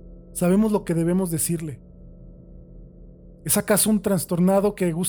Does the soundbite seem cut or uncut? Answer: uncut